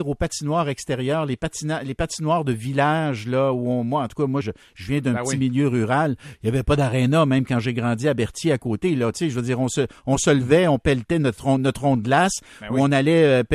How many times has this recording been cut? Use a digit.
1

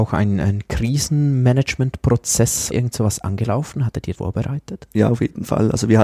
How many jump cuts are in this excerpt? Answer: 2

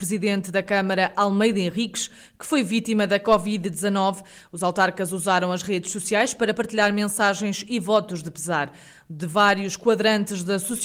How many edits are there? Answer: 0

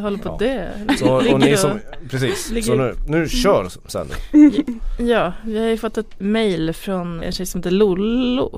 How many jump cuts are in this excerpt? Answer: 2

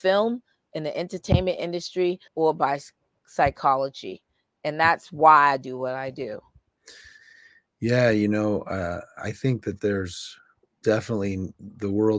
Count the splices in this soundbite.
1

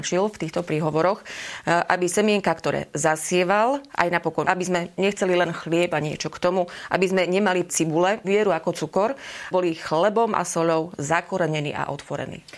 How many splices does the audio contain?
4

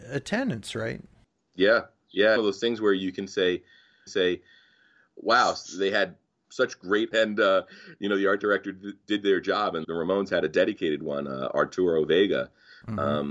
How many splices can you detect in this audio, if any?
4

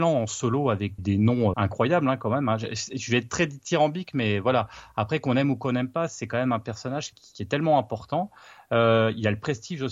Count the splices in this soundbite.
3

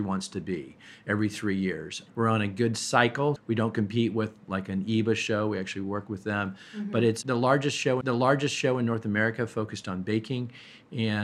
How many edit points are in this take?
2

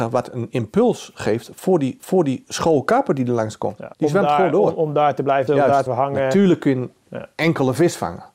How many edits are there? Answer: 4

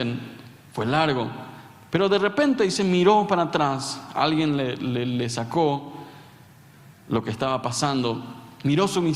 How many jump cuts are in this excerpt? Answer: 0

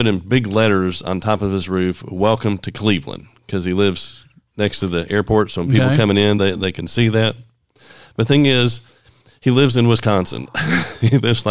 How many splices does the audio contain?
0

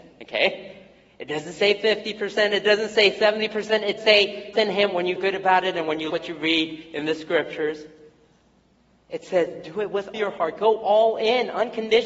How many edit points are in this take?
5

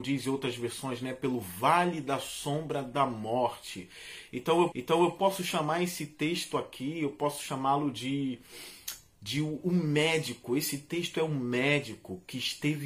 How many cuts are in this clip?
1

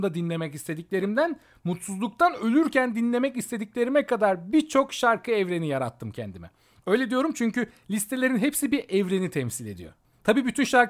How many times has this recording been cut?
0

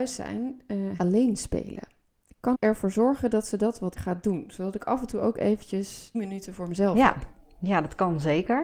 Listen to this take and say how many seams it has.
4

